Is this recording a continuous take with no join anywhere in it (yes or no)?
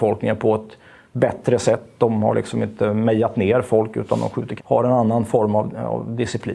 no